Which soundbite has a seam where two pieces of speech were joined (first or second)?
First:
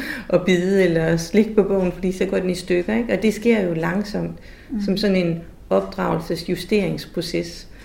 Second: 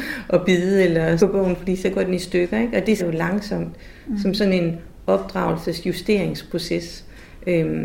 second